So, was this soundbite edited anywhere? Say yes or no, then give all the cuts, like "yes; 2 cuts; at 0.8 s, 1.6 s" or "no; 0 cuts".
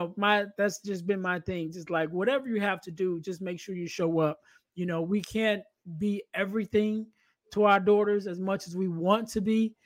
no; 0 cuts